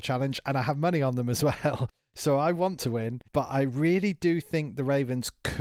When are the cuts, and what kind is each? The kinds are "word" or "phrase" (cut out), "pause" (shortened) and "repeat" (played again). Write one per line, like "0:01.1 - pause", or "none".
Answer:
0:02.8 - word
0:03.3 - pause